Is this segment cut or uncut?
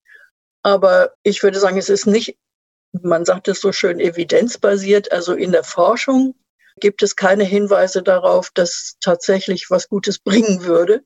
cut